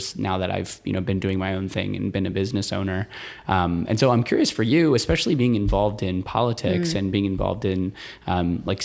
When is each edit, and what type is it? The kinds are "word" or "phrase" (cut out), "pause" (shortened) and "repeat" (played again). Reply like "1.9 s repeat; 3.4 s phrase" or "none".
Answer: none